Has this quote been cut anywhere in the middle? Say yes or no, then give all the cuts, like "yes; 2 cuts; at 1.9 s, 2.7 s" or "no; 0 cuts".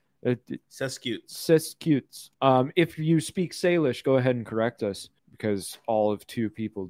yes; 2 cuts; at 2.3 s, 5.2 s